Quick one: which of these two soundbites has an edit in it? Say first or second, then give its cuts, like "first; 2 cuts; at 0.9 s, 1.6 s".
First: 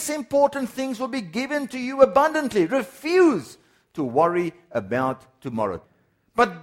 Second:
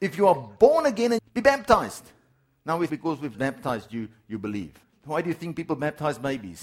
second; 4 cuts; at 1.2 s, 2.9 s, 3.3 s, 4.8 s